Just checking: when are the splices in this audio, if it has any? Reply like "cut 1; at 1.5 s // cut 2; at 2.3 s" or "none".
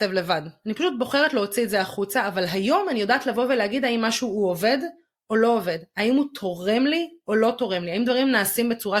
none